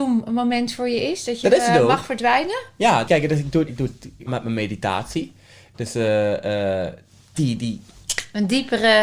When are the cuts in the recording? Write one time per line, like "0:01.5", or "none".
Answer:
0:01.4
0:03.1
0:03.7
0:04.3
0:07.3